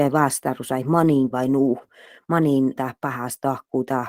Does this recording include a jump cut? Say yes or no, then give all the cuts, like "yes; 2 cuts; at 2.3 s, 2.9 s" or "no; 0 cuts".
yes; 2 cuts; at 1.3 s, 2.8 s